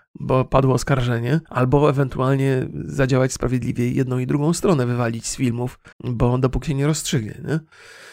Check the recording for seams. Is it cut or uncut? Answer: cut